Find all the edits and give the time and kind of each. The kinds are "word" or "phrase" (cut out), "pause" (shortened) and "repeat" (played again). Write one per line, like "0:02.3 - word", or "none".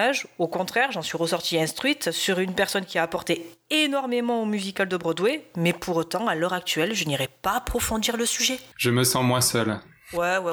0:08.7 - pause